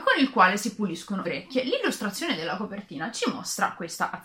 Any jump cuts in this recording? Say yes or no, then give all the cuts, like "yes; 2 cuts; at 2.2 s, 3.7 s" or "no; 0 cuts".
yes; 1 cut; at 1.2 s